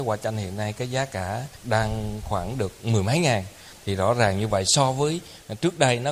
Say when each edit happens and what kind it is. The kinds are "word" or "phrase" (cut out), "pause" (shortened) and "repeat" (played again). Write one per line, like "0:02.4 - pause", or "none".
none